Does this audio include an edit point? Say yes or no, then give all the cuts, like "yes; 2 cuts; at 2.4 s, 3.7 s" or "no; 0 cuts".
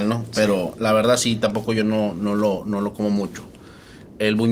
no; 0 cuts